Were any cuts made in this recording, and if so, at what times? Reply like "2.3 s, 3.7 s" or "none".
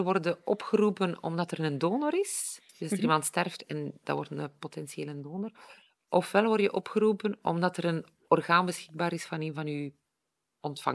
2.7 s